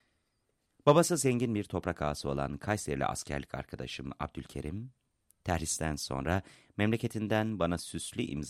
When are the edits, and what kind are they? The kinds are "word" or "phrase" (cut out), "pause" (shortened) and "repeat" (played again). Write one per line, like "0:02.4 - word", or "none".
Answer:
none

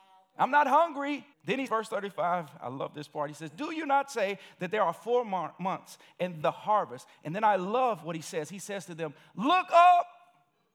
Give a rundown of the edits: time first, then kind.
0:01.3 - pause
0:01.7 - word
0:06.4 - word

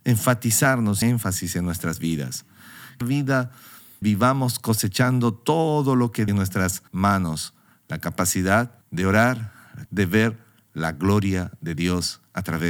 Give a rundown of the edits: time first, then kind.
0:01.0 - phrase
0:03.0 - phrase
0:04.0 - word
0:06.3 - phrase
0:06.9 - pause
0:08.8 - pause
0:09.9 - word

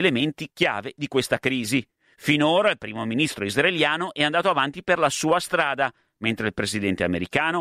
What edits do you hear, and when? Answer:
none

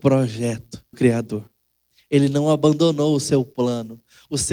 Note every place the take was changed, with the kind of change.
0:00.9 - word

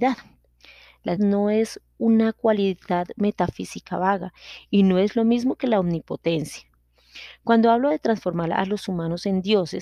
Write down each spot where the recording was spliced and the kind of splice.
0:01.2 - word

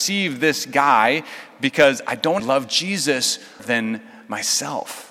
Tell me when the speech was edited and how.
0:02.4 - word
0:03.6 - word

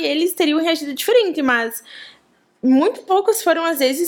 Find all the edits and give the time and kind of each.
none

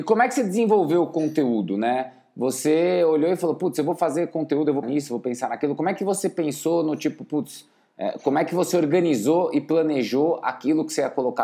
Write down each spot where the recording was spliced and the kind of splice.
0:04.8 - word

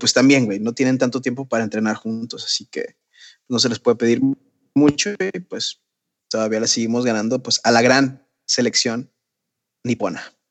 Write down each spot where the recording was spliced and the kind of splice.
none

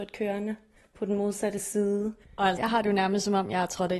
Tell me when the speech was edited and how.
0:02.2 - pause
0:02.6 - word

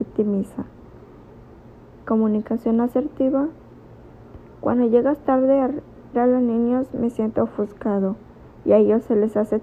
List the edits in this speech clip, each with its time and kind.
0:06.1 - phrase

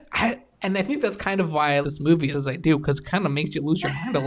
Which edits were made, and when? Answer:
0:01.8 - word
0:02.3 - phrase

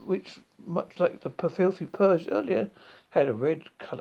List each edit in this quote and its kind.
none

